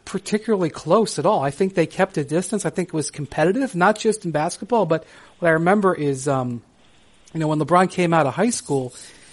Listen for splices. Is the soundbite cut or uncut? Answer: uncut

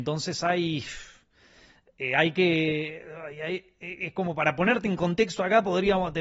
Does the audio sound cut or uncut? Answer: uncut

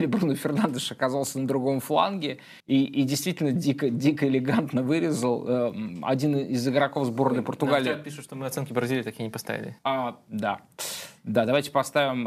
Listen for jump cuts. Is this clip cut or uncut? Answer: cut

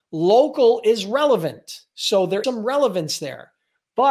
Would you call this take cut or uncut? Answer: cut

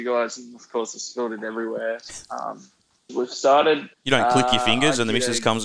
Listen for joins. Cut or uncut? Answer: cut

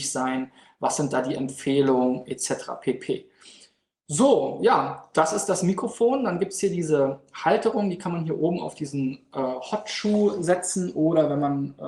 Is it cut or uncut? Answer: uncut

